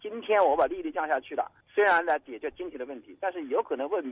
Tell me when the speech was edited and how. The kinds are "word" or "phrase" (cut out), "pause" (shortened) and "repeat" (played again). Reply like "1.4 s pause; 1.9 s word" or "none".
1.6 s pause